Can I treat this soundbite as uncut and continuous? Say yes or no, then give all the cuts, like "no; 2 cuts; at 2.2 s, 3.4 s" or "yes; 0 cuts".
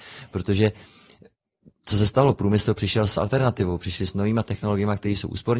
yes; 0 cuts